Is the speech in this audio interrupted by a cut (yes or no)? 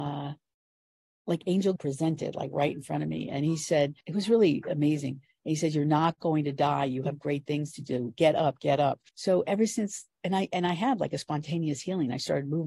yes